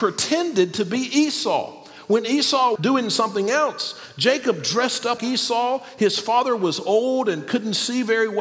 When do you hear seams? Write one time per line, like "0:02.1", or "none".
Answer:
0:02.8
0:05.2